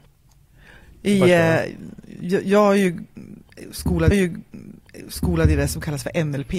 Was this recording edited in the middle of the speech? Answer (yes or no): yes